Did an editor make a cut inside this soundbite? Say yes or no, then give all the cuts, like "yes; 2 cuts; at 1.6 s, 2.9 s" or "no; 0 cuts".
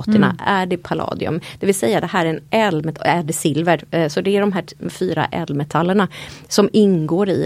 no; 0 cuts